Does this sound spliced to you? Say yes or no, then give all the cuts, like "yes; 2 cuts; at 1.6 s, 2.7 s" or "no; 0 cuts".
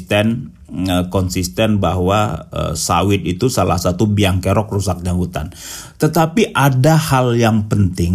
no; 0 cuts